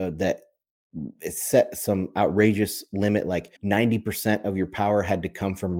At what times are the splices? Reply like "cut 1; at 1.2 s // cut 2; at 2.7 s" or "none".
cut 1; at 3.6 s

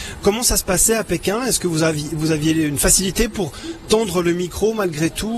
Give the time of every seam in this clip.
none

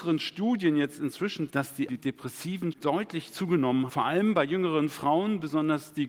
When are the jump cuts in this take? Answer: cut 1; at 1.5 s // cut 2; at 1.9 s // cut 3; at 2.7 s // cut 4; at 3.9 s

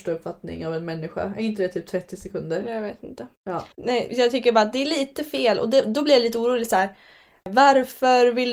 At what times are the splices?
cut 1; at 3.7 s

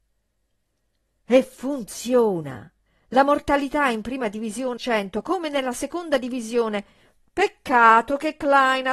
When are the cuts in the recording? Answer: cut 1; at 2.9 s // cut 2; at 4.8 s

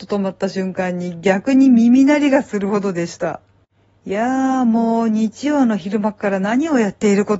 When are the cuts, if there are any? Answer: none

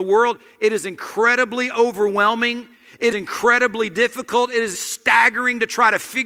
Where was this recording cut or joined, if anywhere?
cut 1; at 3.1 s // cut 2; at 4.7 s

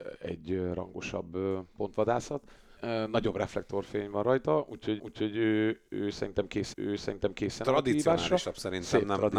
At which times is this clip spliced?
cut 1; at 2.8 s // cut 2; at 5.0 s // cut 3; at 6.7 s

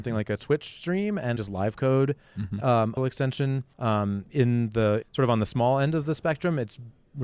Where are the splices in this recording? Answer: cut 1; at 1.4 s // cut 2; at 3.0 s // cut 3; at 3.7 s // cut 4; at 5.0 s

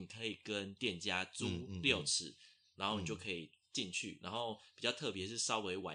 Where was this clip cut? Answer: none

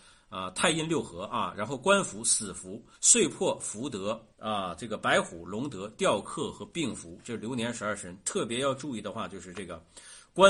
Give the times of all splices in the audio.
cut 1; at 2.9 s // cut 2; at 4.3 s

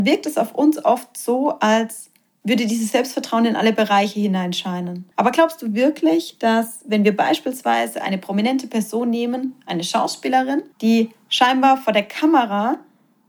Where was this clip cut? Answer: cut 1; at 2.3 s // cut 2; at 5.1 s // cut 3; at 10.7 s

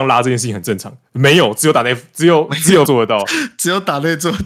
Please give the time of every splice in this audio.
cut 1; at 2.9 s

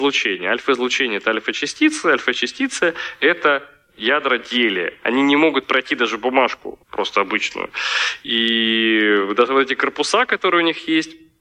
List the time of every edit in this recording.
cut 1; at 6.8 s

